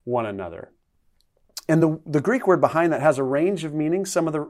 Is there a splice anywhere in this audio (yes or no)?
no